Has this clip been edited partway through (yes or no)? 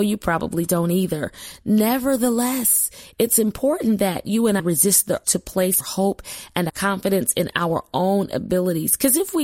yes